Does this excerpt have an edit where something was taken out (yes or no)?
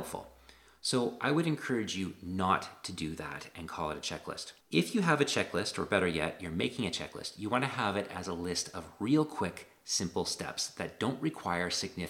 yes